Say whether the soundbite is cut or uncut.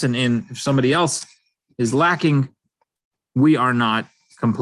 uncut